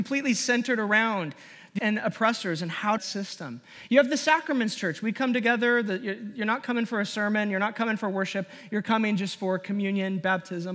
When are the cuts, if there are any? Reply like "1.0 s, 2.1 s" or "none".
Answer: 1.8 s, 3.0 s

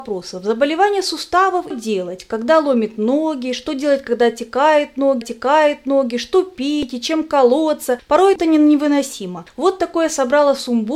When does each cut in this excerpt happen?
1.7 s, 5.2 s, 8.4 s

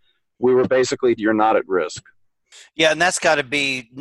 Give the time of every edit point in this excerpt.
1.2 s

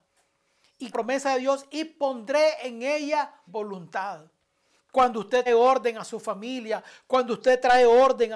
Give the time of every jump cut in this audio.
0.9 s, 3.5 s, 5.5 s

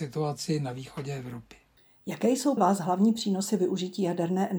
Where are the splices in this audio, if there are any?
1.8 s, 2.6 s

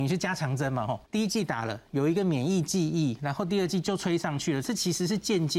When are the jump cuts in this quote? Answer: 1.0 s

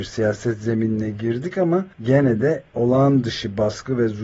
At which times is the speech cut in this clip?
1.9 s, 2.7 s

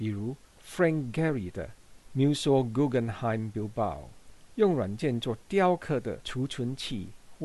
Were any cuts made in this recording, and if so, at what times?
none

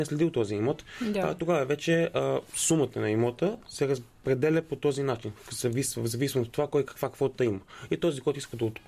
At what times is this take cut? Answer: none

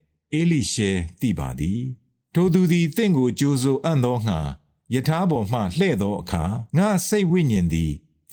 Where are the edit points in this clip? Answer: 6.7 s

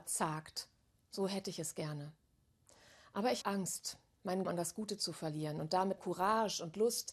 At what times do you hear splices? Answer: 3.4 s, 4.4 s, 6.0 s

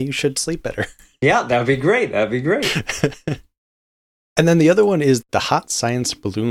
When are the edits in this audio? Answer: none

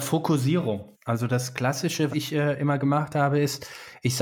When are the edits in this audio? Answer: 0.9 s, 2.1 s

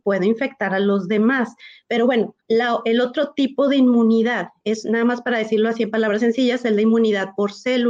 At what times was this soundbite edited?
2.4 s

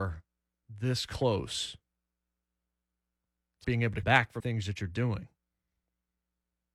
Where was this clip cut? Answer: 3.6 s, 4.0 s, 4.4 s

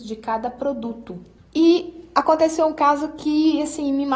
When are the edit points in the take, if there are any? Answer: none

